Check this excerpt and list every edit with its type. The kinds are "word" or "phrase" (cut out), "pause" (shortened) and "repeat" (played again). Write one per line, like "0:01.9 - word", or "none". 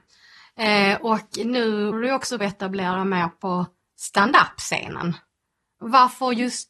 0:01.9 - word
0:02.4 - word